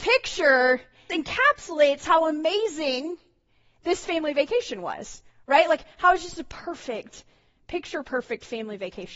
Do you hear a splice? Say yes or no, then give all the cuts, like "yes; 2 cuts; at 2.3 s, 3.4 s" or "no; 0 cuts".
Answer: yes; 1 cut; at 1.1 s